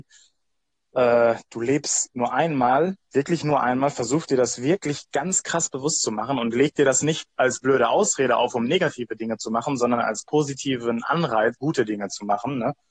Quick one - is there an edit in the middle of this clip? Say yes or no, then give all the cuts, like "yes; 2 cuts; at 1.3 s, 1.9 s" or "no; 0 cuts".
yes; 3 cuts; at 3.0 s, 7.3 s, 11.5 s